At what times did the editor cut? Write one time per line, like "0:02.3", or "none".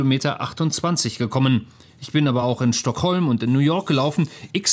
none